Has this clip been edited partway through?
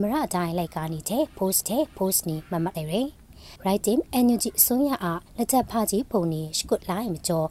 yes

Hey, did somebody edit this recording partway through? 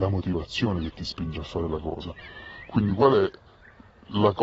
no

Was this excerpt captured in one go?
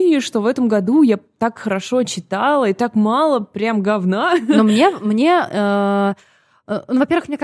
yes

